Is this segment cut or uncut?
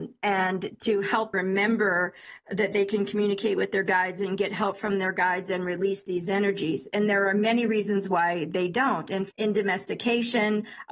cut